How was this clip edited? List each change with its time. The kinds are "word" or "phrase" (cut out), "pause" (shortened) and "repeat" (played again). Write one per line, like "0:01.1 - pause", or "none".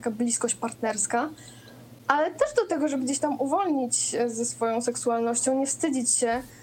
0:03.0 - word